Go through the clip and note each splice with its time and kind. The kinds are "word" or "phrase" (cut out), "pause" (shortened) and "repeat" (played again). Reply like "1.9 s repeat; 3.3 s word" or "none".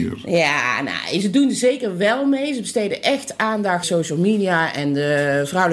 3.8 s word

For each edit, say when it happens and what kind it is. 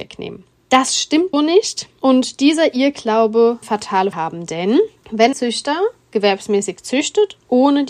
1.3 s word; 3.6 s word; 4.1 s word; 5.3 s word

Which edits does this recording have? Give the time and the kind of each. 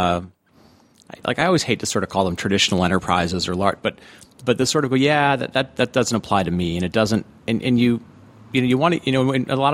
none

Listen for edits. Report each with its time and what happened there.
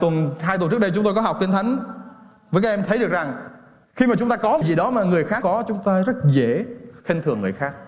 2.9 s phrase; 4.6 s word; 5.4 s word

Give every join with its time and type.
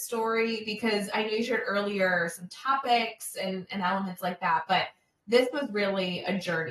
none

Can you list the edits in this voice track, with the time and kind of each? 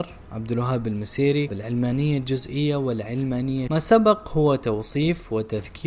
1.5 s word; 3.7 s word

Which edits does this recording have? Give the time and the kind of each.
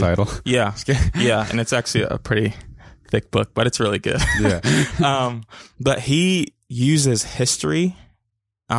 none

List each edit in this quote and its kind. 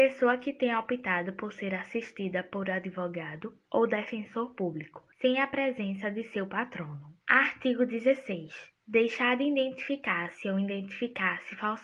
5.1 s pause; 7.2 s pause; 8.8 s pause

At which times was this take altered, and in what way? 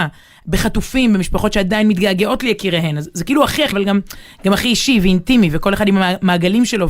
3.7 s word

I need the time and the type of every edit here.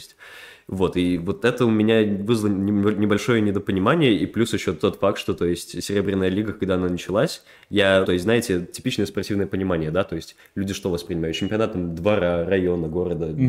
8.0 s word

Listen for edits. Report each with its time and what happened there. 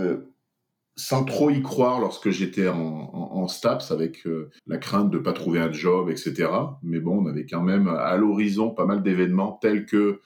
4.6 s pause

